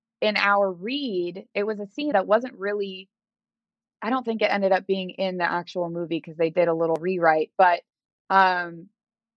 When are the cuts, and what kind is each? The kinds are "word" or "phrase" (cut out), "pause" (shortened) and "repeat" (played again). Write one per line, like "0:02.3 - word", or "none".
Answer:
0:02.1 - word